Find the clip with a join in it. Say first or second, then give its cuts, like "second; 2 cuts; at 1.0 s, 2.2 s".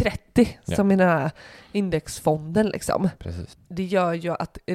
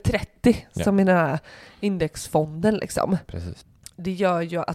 first; 1 cut; at 3.6 s